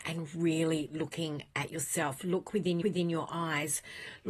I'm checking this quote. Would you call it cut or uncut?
cut